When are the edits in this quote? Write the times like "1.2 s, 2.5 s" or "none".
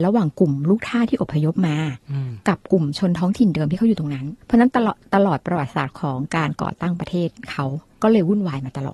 4.4 s, 7.9 s